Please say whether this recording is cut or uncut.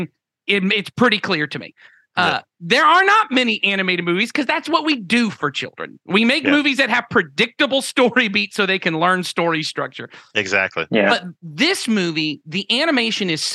uncut